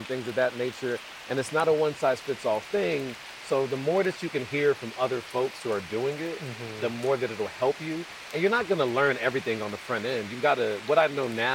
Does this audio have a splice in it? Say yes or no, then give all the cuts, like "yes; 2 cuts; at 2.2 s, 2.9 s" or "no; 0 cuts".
no; 0 cuts